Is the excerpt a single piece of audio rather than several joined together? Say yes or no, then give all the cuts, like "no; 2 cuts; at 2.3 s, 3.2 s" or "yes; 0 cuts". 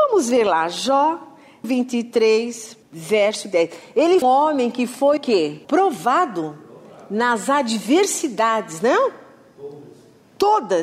no; 5 cuts; at 1.6 s, 2.8 s, 4.2 s, 5.2 s, 5.6 s